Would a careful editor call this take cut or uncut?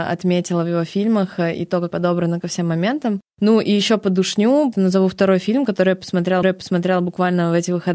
cut